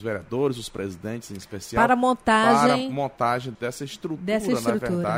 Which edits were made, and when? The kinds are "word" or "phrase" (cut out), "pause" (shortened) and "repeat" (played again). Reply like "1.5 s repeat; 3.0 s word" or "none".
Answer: 3.6 s word